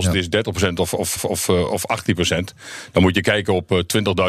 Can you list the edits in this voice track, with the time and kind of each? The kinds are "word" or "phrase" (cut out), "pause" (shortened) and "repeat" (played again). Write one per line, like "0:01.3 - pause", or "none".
0:01.2 - repeat